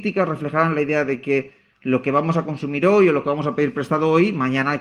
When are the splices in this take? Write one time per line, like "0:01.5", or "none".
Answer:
none